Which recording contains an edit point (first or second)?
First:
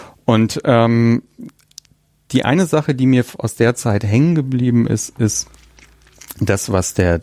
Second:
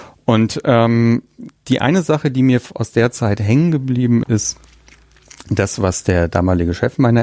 second